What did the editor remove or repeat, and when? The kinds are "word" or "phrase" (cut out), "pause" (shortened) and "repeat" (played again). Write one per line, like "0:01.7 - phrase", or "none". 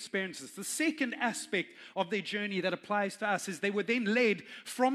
none